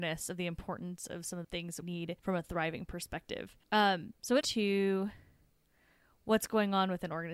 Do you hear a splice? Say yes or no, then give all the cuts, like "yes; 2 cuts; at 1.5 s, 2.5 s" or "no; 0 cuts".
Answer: yes; 5 cuts; at 1.4 s, 1.8 s, 2.2 s, 3.6 s, 4.4 s